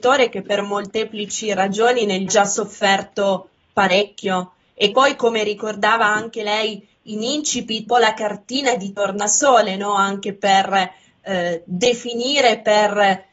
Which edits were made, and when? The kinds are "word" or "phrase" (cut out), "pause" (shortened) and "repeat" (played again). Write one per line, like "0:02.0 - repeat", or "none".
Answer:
0:02.3 - phrase
0:04.9 - word
0:07.9 - phrase